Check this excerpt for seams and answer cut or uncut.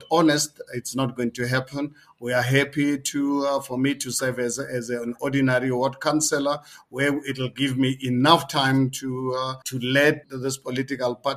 cut